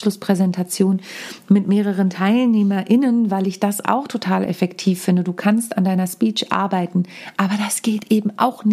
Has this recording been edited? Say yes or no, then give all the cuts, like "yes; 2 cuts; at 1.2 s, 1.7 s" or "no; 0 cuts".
no; 0 cuts